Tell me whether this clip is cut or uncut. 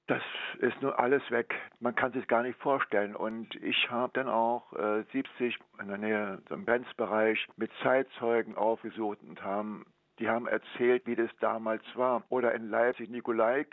uncut